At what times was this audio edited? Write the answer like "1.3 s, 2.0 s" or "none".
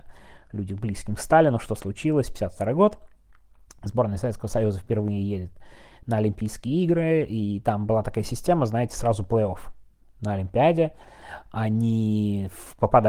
none